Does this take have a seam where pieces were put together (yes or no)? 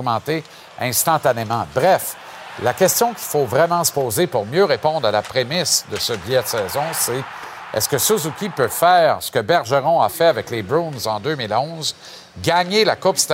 no